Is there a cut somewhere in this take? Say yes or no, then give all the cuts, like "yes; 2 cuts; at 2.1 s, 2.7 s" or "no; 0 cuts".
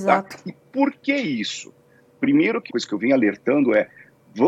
yes; 1 cut; at 2.7 s